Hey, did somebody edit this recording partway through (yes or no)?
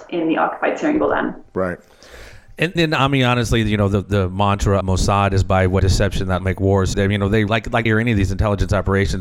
yes